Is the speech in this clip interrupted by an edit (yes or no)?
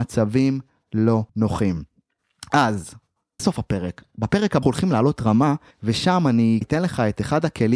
yes